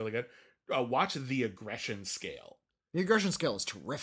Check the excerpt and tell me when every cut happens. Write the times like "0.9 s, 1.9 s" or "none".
none